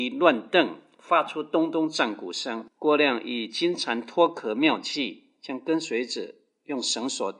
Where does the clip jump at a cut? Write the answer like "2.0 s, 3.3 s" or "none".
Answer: none